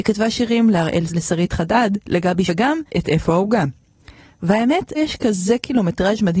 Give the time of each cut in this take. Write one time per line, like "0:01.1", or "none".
0:01.1
0:02.5
0:02.9
0:04.9